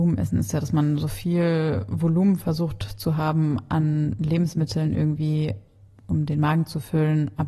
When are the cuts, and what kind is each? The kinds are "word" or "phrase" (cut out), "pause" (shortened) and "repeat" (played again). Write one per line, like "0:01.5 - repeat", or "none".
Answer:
none